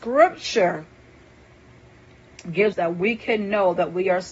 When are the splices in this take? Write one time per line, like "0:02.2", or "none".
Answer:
0:02.7